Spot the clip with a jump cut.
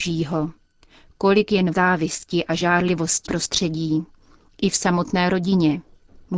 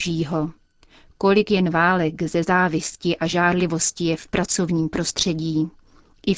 first; 2 cuts; at 1.7 s, 3.3 s

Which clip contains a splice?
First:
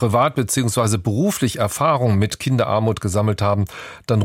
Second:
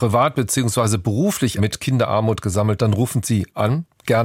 second; 2 cuts; at 1.6 s, 2.8 s

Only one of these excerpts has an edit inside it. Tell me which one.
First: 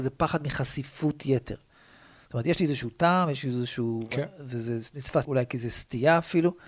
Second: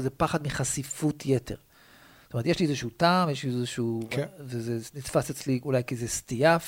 first; 1 cut; at 5.2 s

